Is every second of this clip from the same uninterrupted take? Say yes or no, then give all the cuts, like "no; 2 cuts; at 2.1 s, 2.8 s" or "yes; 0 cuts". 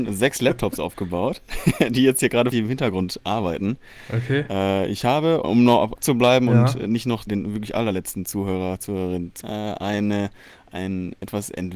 no; 5 cuts; at 2.5 s, 5.4 s, 6.0 s, 7.3 s, 9.4 s